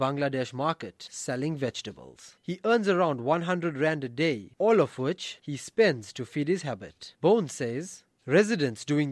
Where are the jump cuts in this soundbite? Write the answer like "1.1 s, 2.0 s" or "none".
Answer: none